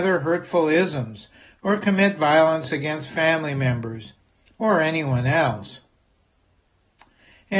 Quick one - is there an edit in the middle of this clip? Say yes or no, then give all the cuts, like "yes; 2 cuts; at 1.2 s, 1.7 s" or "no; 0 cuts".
no; 0 cuts